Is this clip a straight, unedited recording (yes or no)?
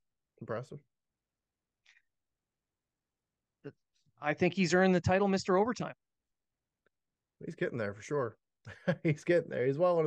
yes